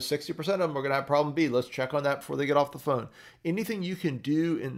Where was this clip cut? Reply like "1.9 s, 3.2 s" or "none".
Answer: none

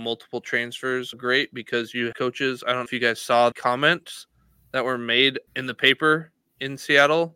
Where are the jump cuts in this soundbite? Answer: 1.1 s, 2.1 s, 2.9 s, 3.5 s, 5.5 s

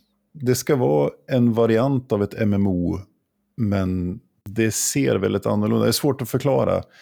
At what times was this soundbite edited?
none

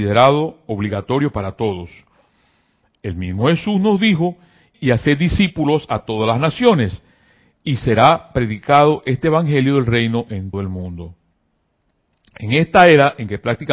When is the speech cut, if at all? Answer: 4.7 s, 10.5 s

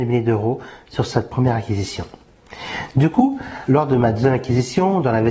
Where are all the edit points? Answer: 3.7 s

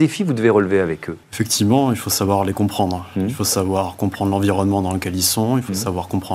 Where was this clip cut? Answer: 1.2 s

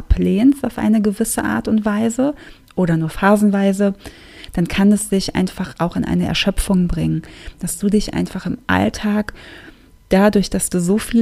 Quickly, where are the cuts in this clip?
none

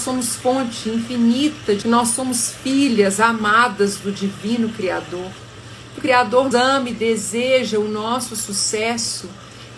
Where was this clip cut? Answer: 1.8 s, 6.0 s, 6.5 s

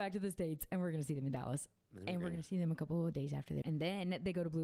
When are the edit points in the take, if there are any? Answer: 3.6 s

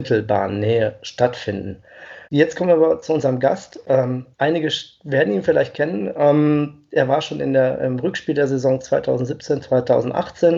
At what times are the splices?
2.2 s, 4.3 s

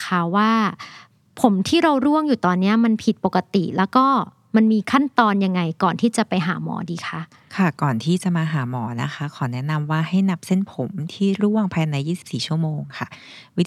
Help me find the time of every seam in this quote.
7.4 s

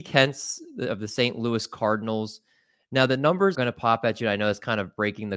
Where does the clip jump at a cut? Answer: 3.5 s

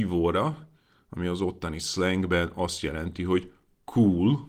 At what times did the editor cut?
none

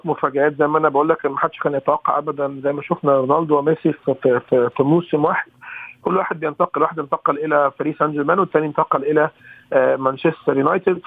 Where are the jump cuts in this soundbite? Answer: none

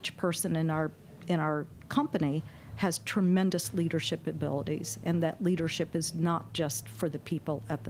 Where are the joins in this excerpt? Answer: none

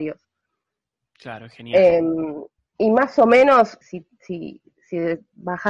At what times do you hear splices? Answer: 2.6 s, 3.8 s

